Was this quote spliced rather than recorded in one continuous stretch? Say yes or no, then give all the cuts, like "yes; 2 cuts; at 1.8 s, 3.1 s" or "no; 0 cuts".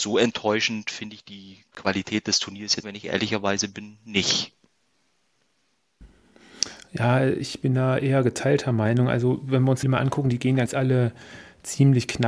yes; 3 cuts; at 2.8 s, 9.8 s, 10.7 s